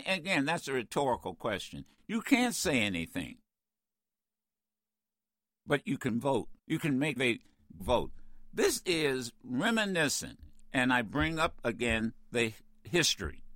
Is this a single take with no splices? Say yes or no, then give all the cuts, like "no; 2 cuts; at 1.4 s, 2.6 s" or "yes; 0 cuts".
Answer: no; 4 cuts; at 6.6 s, 7.2 s, 7.8 s, 8.8 s